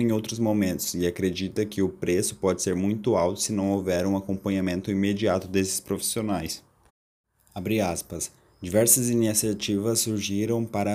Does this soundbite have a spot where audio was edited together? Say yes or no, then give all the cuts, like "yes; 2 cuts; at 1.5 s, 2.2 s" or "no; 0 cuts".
no; 0 cuts